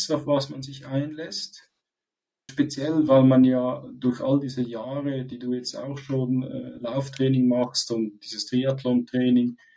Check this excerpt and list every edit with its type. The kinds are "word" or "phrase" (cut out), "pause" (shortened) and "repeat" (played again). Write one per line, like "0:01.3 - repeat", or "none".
0:02.5 - word